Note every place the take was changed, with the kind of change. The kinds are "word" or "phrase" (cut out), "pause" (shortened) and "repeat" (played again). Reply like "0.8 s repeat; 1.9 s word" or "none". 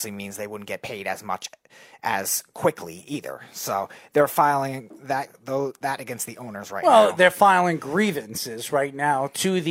none